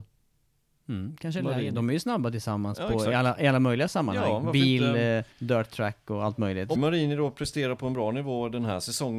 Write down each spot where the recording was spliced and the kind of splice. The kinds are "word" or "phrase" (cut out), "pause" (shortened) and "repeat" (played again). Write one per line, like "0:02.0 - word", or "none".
0:05.3 - pause
0:06.8 - word

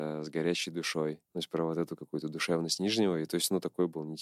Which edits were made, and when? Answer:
0:01.2 - pause

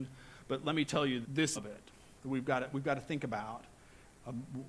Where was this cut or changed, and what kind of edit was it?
0:01.2 - word
0:01.6 - phrase
0:02.2 - pause

